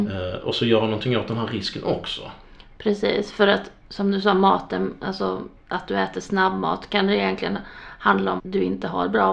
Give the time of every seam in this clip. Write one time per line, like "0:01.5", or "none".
0:05.6
0:08.4